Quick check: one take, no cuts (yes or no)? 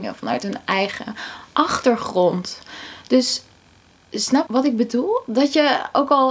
no